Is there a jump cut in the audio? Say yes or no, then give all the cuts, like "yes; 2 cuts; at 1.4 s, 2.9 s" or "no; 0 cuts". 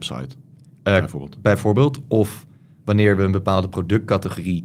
no; 0 cuts